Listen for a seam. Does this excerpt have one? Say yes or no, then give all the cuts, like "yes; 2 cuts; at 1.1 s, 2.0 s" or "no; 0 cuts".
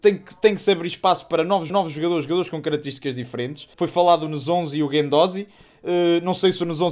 yes; 2 cuts; at 1.7 s, 3.7 s